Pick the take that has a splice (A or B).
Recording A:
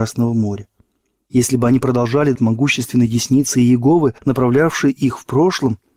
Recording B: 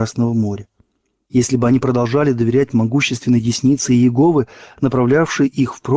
A